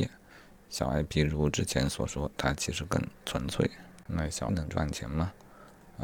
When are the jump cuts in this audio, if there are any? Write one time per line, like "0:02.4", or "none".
0:04.5